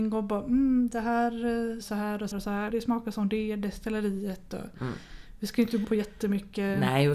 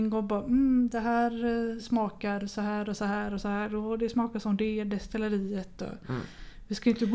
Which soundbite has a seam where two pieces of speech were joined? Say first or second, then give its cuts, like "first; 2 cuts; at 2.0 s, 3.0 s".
first; 4 cuts; at 1.8 s, 2.3 s, 2.7 s, 5.8 s